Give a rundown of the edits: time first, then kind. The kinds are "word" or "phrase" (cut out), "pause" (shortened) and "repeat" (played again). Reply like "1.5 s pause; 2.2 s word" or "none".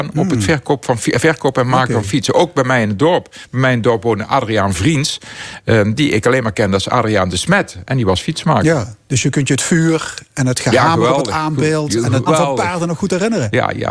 12.3 s word